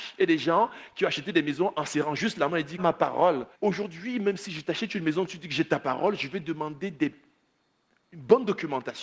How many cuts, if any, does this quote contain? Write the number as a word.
two